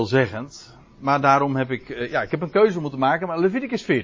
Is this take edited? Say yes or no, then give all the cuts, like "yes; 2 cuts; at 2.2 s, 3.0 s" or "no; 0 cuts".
no; 0 cuts